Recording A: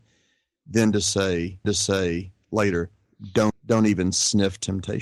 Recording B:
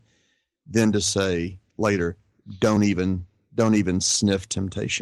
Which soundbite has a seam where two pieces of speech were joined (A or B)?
A